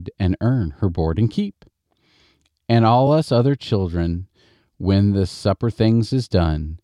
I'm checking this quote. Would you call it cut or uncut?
uncut